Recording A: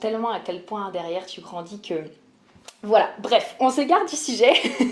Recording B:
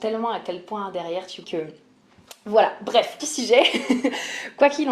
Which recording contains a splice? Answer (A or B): B